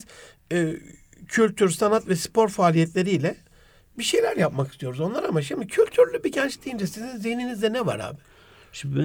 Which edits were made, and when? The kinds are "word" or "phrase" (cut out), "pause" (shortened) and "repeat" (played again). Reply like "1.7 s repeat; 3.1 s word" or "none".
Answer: none